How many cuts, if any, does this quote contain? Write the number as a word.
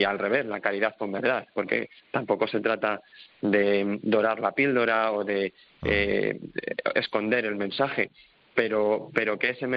zero